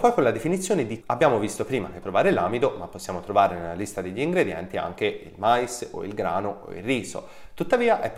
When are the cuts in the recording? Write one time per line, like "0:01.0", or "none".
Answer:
0:01.0
0:02.0